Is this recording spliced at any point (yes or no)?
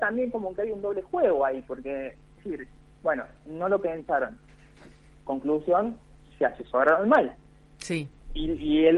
yes